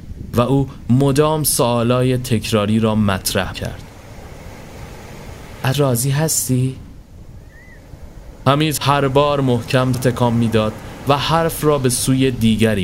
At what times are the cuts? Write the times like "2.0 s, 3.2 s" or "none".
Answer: 3.5 s, 5.7 s, 8.8 s, 9.9 s